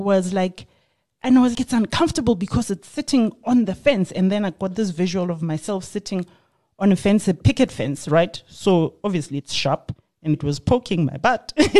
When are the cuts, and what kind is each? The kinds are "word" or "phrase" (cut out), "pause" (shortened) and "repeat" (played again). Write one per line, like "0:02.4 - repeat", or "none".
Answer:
0:01.5 - word
0:10.3 - word